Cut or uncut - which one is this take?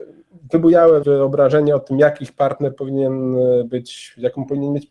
cut